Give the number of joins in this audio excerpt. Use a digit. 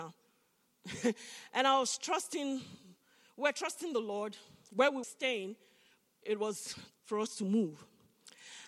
2